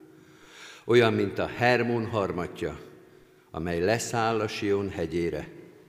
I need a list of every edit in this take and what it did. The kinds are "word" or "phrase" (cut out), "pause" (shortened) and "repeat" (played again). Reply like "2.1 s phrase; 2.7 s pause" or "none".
none